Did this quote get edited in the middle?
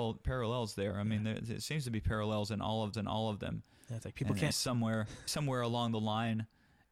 yes; 3 cuts; at 2.9 s, 4.5 s, 5.3 s

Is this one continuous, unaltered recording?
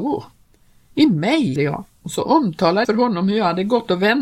no; 2 cuts; at 1.6 s, 2.8 s

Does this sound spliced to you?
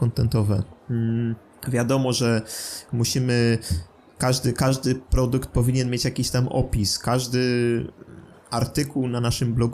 no; 0 cuts

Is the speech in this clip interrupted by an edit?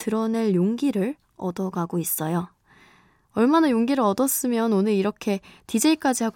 no; 0 cuts

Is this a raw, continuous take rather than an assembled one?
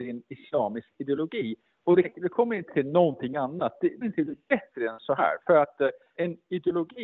no; 4 cuts; at 2.0 s, 2.7 s, 4.0 s, 6.2 s

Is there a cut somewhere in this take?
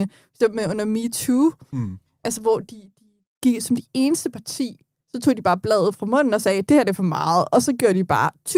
no; 0 cuts

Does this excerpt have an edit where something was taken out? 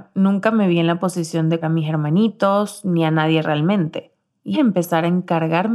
yes; 2 cuts; at 1.6 s, 4.5 s

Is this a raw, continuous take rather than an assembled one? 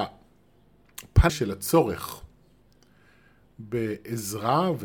no; 1 cut; at 1.3 s

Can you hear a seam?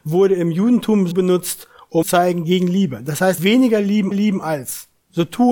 yes; 4 cuts; at 1.1 s, 2.0 s, 3.4 s, 4.1 s

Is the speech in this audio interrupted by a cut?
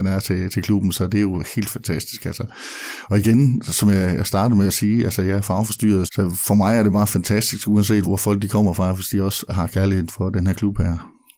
yes; 3 cuts; at 6.1 s, 8.0 s, 10.1 s

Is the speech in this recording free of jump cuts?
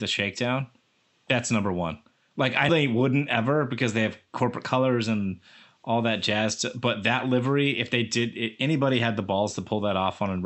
no; 1 cut; at 2.7 s

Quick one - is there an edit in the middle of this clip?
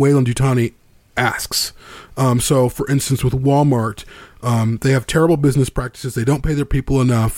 no; 0 cuts

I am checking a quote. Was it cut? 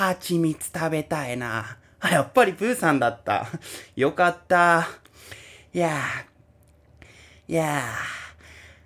no; 0 cuts

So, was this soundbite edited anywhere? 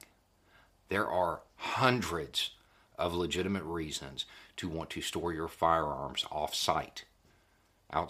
yes; 1 cut; at 1.5 s

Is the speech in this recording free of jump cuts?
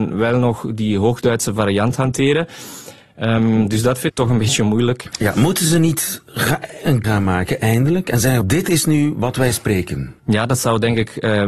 no; 4 cuts; at 4.1 s, 7.0 s, 8.4 s, 10.2 s

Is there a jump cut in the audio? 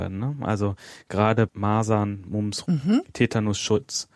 yes; 2 cuts; at 1.5 s, 2.6 s

